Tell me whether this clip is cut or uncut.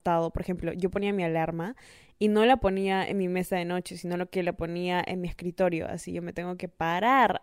uncut